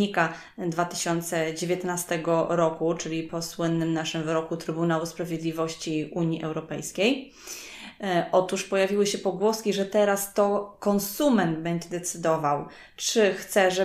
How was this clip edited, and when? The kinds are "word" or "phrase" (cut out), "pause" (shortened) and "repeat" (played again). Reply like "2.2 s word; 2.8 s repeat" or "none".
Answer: none

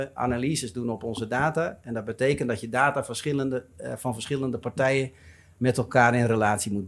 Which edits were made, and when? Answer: none

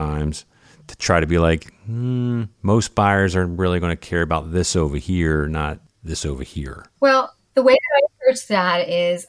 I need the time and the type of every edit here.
2.5 s pause

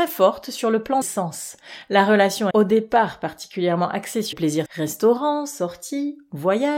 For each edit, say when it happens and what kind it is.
1.0 s word; 2.5 s word; 4.3 s word; 4.7 s word

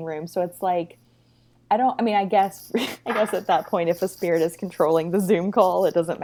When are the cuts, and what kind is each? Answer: none

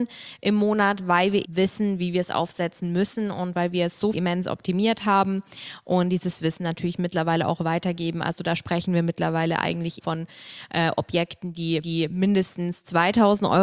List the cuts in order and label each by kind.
1.4 s word; 4.1 s word; 10.0 s word; 11.8 s repeat

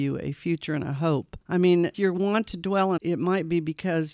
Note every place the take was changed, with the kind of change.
1.4 s pause; 1.9 s word; 3.0 s word

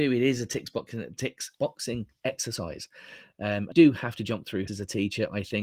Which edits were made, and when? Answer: 1.5 s word; 3.7 s word; 4.7 s word

